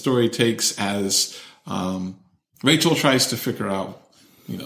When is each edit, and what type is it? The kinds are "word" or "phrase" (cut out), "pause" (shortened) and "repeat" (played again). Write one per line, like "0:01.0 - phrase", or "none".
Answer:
none